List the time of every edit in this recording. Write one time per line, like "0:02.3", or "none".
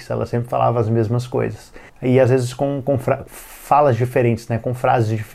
0:01.9